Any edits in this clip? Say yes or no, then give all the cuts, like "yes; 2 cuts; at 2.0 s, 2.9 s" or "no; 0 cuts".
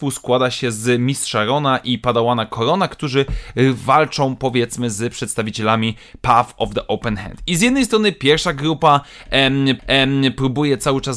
yes; 1 cut; at 9.8 s